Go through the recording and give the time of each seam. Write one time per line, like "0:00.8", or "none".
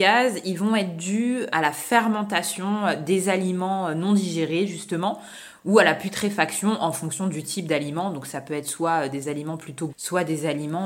0:01.5
0:09.9

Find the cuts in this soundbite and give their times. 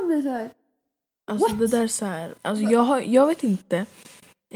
0:02.4

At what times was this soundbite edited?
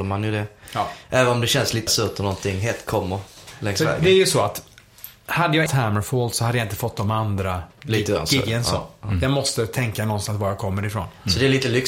0:01.9
0:05.7
0:07.7

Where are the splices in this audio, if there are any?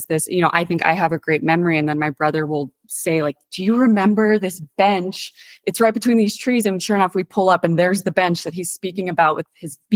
none

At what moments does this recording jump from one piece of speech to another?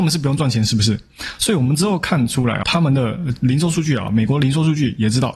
0:02.6

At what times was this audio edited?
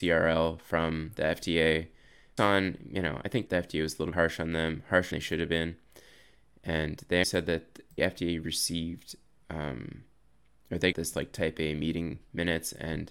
0:02.4
0:03.5
0:04.1
0:05.1
0:07.2
0:08.0
0:10.9

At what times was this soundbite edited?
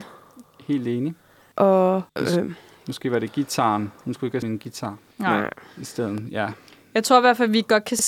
0:02.1
0:04.4
0:05.1

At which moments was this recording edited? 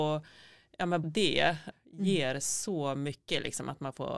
0:01.0
0:01.7

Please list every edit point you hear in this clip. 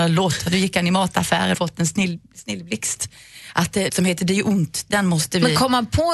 0:01.5
0:03.9

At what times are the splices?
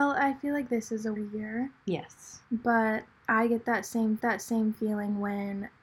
0:01.2
0:02.4
0:04.2

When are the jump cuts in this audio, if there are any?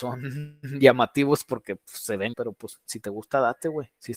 0:02.3

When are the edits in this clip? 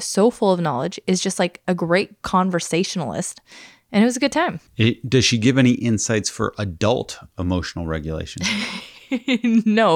0:04.7

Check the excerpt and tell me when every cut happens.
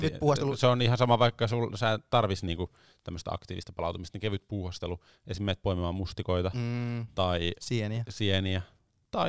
none

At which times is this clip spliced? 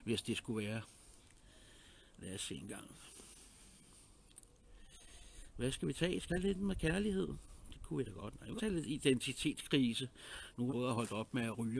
0:06.3
0:08.6
0:10.7

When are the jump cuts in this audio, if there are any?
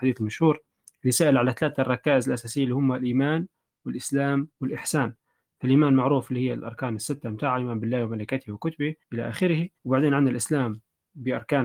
0:04.5
0:09.0
0:09.8

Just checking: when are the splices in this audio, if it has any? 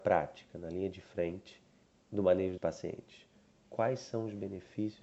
0:01.8
0:02.6

